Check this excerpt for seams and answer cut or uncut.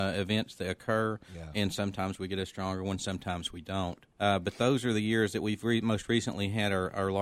cut